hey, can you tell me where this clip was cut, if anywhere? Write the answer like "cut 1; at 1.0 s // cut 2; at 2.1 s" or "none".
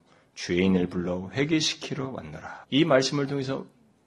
cut 1; at 2.6 s